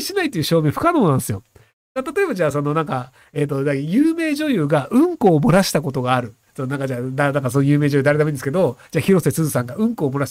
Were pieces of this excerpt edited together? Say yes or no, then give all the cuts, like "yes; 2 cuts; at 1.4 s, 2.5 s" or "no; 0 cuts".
no; 0 cuts